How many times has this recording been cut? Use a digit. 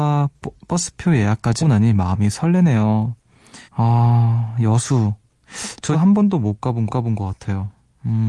4